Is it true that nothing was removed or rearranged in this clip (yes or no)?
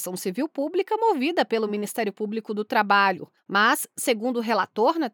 yes